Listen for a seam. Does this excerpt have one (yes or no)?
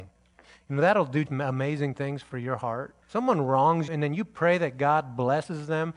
yes